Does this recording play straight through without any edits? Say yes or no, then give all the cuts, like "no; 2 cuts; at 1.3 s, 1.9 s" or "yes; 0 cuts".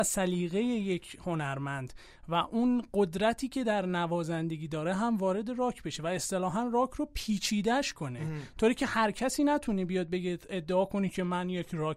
yes; 0 cuts